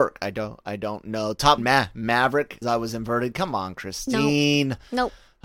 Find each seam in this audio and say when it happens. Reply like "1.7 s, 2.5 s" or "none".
1.6 s, 2.6 s